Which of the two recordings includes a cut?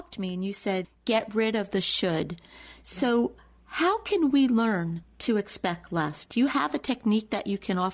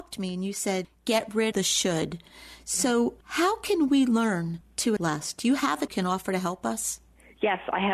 second; 4 cuts; at 1.5 s, 3.2 s, 5.0 s, 5.9 s

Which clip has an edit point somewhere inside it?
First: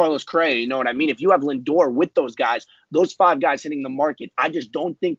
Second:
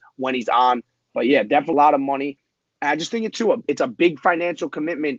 second; 2 cuts; at 1.7 s, 3.3 s

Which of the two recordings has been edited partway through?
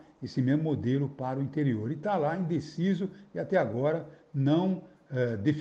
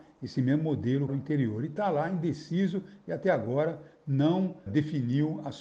second; 2 cuts; at 1.1 s, 4.7 s

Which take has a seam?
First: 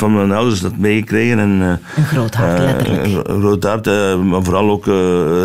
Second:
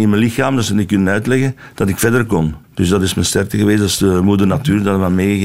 second; 1 cut; at 2.6 s

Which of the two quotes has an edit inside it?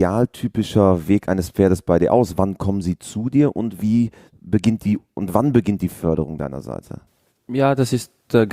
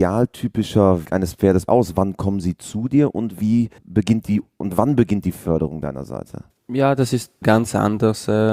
second; 5 cuts; at 1.1 s, 1.7 s, 3.8 s, 6.5 s, 7.4 s

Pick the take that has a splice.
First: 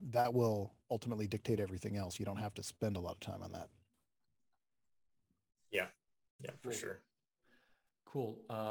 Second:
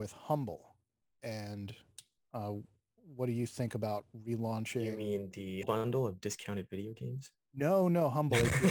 second; 1 cut; at 5.6 s

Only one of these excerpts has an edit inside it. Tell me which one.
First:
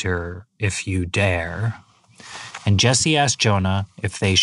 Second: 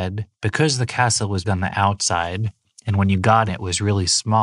second; 2 cuts; at 1.4 s, 3.5 s

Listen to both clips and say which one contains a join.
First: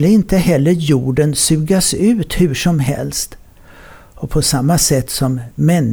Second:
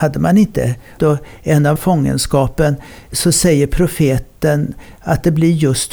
second; 2 cuts; at 1.0 s, 1.8 s

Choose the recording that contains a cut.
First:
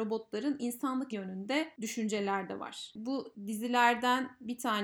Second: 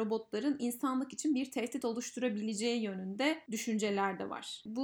first; 1 cut; at 1.1 s

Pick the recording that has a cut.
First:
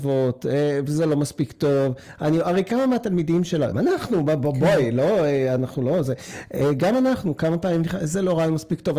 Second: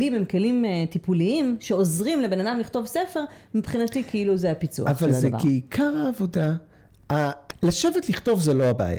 first; 1 cut; at 3.7 s

